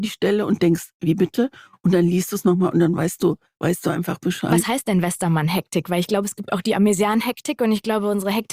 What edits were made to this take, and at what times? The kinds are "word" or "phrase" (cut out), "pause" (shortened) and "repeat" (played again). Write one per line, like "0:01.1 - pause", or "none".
none